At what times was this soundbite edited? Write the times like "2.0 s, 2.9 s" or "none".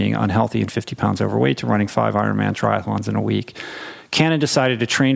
none